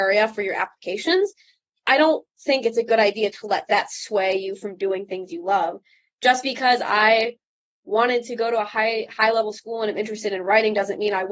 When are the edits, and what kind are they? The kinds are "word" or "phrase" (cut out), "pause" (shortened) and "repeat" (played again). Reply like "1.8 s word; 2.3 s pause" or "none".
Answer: none